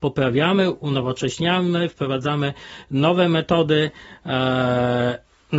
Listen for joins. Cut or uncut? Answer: uncut